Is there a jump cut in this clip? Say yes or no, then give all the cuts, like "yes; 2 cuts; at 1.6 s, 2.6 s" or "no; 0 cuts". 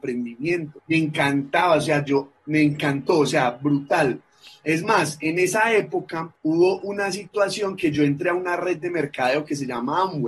no; 0 cuts